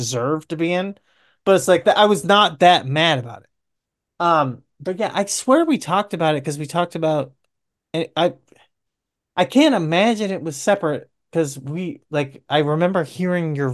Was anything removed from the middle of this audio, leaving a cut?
no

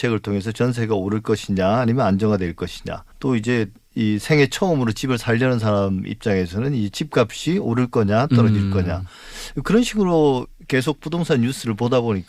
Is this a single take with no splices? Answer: no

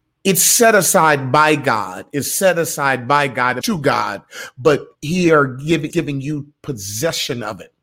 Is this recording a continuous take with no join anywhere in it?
no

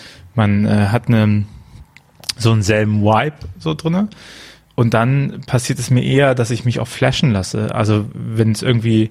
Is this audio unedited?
yes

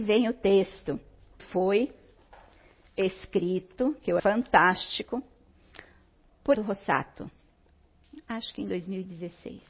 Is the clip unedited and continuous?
no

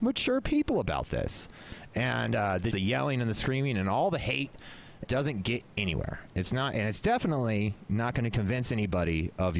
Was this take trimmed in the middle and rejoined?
yes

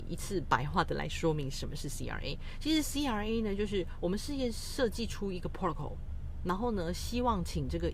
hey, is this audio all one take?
yes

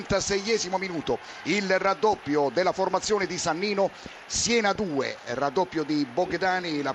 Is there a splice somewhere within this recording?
no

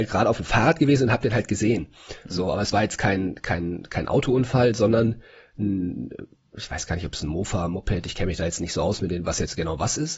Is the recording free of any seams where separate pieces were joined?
yes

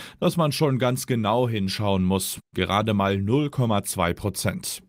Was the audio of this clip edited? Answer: no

